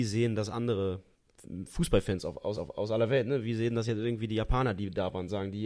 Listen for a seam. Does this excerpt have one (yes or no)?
yes